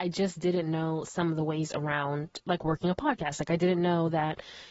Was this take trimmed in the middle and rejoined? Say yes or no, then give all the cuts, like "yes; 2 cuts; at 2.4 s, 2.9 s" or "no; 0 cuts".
no; 0 cuts